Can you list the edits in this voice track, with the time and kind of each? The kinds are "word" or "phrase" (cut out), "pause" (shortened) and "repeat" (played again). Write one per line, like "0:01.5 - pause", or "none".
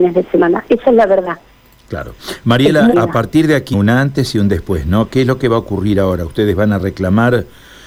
0:02.9 - word
0:03.7 - word

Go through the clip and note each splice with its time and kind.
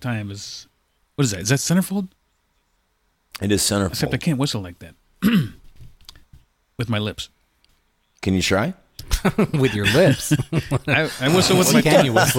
none

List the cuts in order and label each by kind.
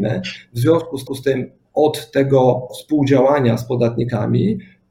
0:01.1 - repeat
0:02.7 - word

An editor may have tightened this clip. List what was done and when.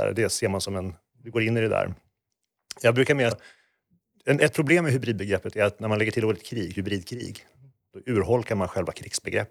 0:03.3 - word

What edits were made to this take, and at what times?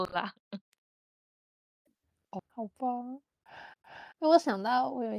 0:02.5 - pause
0:03.8 - repeat

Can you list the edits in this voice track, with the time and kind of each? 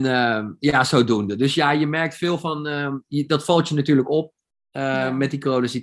none

